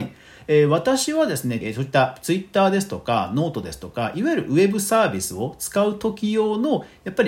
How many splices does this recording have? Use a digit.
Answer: 1